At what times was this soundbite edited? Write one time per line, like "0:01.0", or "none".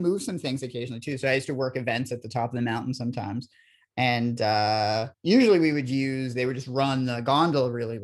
0:05.1